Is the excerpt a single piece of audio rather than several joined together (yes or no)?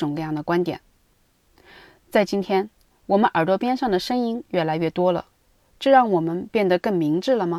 yes